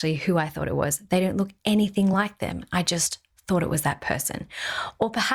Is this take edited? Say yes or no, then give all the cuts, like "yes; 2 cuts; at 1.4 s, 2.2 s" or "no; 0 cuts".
no; 0 cuts